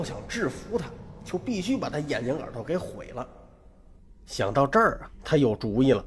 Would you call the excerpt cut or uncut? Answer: uncut